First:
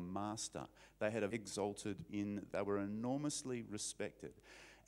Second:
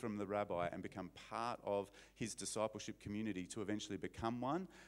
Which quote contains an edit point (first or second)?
first